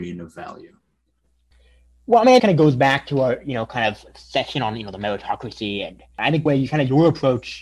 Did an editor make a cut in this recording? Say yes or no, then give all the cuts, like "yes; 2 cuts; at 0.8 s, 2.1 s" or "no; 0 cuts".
yes; 3 cuts; at 2.4 s, 4.1 s, 6.5 s